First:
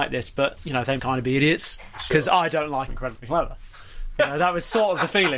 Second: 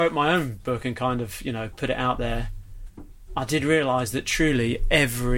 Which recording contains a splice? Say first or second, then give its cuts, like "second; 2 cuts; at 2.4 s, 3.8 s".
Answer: first; 2 cuts; at 1.0 s, 2.9 s